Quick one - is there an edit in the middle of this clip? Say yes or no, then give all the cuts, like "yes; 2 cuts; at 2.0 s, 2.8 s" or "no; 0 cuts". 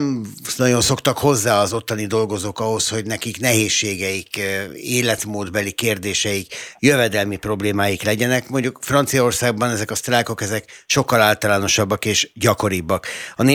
no; 0 cuts